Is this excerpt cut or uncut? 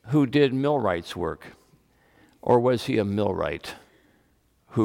uncut